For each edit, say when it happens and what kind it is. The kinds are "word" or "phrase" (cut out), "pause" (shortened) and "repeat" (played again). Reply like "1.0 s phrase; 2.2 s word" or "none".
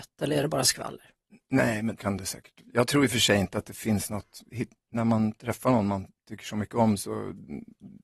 2.0 s word